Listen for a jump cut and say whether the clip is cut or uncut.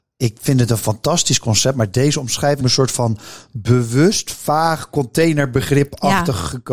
cut